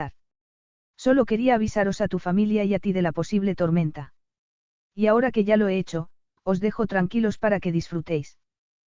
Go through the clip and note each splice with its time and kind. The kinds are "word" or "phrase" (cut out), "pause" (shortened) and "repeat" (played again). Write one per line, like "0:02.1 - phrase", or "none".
none